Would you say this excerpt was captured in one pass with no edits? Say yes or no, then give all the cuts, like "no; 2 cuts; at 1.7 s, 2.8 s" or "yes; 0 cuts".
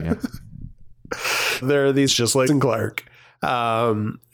no; 3 cuts; at 1.6 s, 2.1 s, 2.5 s